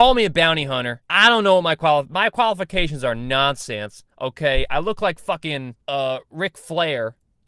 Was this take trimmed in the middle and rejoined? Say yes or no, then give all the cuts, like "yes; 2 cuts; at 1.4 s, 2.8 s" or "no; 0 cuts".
yes; 3 cuts; at 1.0 s, 4.1 s, 5.8 s